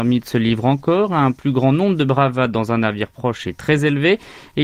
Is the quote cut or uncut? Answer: uncut